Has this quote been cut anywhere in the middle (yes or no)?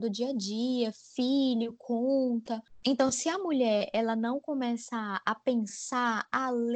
no